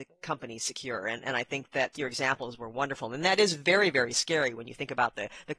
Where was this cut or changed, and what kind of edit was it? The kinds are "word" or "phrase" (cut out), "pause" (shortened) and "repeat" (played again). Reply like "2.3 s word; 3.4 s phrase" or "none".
1.9 s word